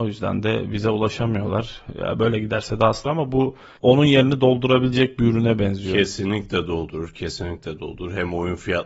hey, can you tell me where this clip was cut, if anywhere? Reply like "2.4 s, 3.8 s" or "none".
3.1 s